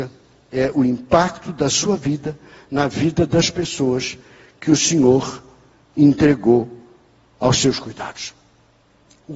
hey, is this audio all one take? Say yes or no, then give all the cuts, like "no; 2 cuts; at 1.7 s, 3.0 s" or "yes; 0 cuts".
yes; 0 cuts